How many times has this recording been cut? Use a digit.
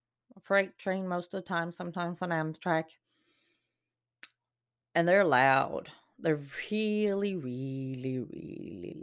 0